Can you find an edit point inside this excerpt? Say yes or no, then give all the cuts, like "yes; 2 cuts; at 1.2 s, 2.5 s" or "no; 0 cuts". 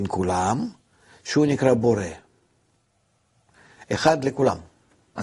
no; 0 cuts